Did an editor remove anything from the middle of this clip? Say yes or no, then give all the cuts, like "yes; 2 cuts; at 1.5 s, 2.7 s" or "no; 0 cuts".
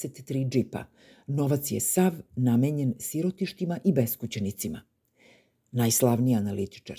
no; 0 cuts